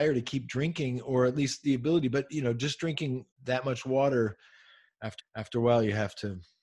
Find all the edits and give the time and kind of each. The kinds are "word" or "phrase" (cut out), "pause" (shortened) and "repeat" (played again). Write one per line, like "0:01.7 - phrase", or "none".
0:03.3 - pause
0:05.2 - repeat